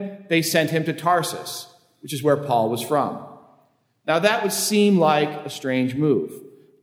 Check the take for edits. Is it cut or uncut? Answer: uncut